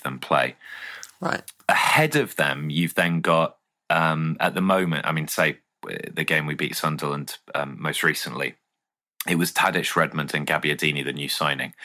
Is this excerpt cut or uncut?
uncut